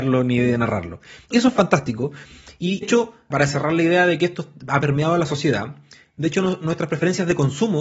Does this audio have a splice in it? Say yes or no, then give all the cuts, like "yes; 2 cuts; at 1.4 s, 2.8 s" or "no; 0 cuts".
yes; 3 cuts; at 1.3 s, 2.8 s, 3.3 s